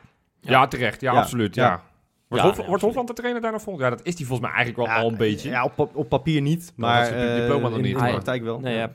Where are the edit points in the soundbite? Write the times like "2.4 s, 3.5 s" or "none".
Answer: none